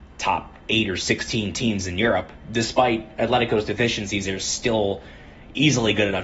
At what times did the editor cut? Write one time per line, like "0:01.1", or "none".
none